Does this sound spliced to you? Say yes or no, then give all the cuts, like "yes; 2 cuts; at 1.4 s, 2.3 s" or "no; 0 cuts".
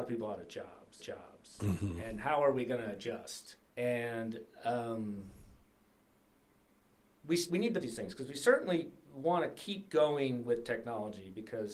yes; 4 cuts; at 1.0 s, 3.7 s, 7.5 s, 7.8 s